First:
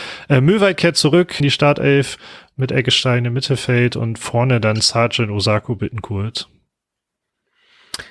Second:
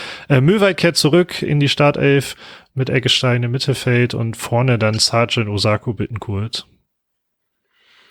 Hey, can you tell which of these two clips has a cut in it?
first; 1 cut; at 1.4 s

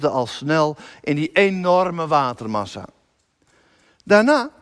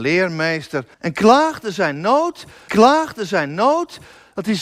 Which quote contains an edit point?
second; 2 cuts; at 0.9 s, 2.7 s

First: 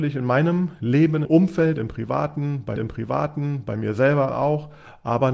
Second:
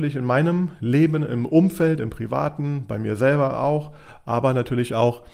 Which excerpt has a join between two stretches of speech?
first; 2 cuts; at 1.2 s, 2.8 s

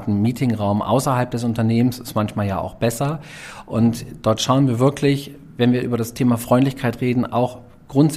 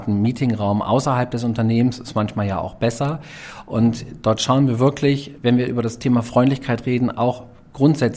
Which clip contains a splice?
second; 1 cut; at 5.4 s

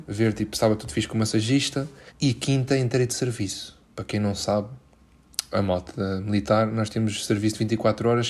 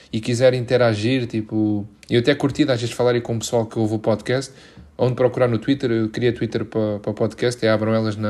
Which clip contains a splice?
first; 2 cuts; at 2.1 s, 3.9 s

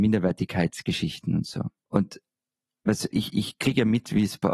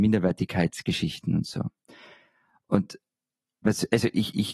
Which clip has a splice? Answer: first; 2 cuts; at 1.8 s, 3.1 s

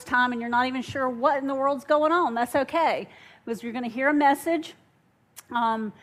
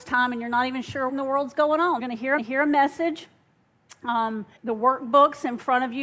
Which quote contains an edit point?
second; 4 cuts; at 1.1 s, 2.0 s, 2.4 s, 4.6 s

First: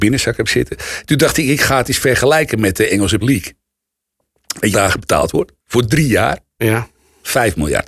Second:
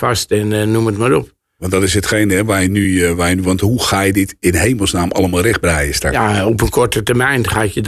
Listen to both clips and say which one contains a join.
first; 3 cuts; at 3.2 s, 4.7 s, 5.6 s

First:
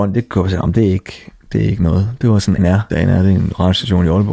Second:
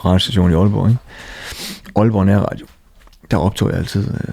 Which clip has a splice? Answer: first; 2 cuts; at 2.6 s, 2.9 s

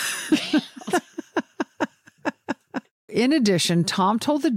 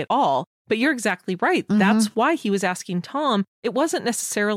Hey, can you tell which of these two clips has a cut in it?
first; 1 cut; at 3.1 s

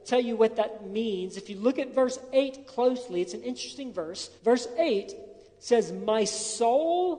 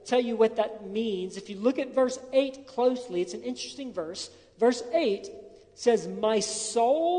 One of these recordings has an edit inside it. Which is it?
first; 1 cut; at 4.4 s

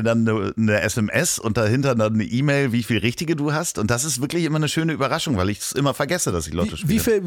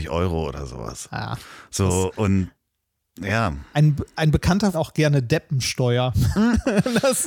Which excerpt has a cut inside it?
second; 1 cut; at 4.7 s

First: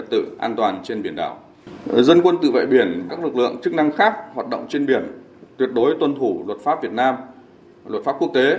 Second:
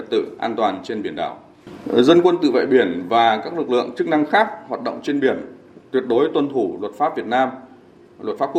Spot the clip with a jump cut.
first; 1 cut; at 3.1 s

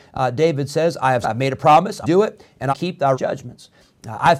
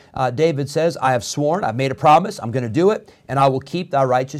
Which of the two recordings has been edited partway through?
first; 4 cuts; at 1.2 s, 2.0 s, 2.7 s, 3.1 s

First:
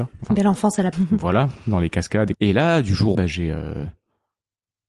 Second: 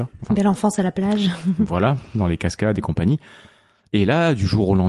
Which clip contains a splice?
first; 3 cuts; at 0.9 s, 2.3 s, 3.1 s

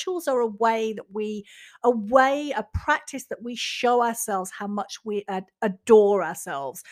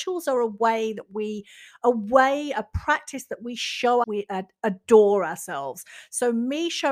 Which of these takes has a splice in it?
second; 1 cut; at 4.0 s

